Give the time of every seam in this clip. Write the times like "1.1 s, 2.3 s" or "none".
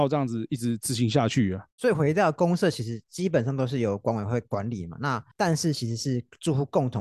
1.7 s, 5.3 s

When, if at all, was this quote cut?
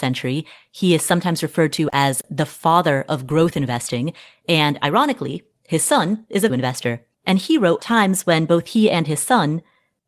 6.5 s, 7.1 s, 7.8 s

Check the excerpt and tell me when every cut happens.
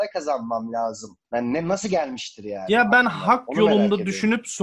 1.2 s

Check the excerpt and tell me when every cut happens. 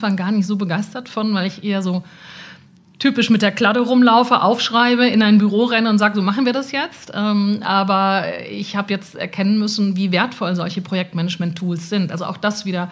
none

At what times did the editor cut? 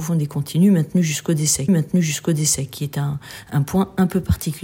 1.7 s

